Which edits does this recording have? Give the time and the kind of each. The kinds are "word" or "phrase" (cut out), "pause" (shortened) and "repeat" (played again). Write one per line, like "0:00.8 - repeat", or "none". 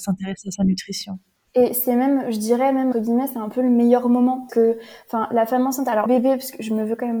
0:02.9 - word
0:04.5 - word
0:06.1 - word